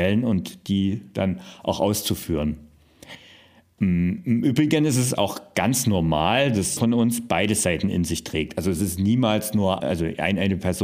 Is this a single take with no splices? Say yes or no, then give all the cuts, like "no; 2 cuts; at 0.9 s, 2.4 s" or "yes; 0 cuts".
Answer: no; 2 cuts; at 6.8 s, 9.8 s